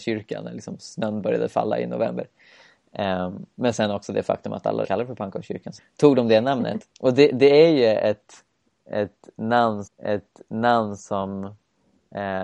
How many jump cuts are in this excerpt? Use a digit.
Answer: 4